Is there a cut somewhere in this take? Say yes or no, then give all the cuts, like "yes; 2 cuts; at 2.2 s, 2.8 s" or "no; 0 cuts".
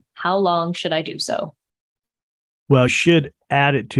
yes; 1 cut; at 2.9 s